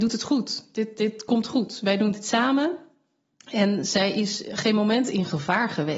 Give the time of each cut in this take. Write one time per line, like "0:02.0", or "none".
none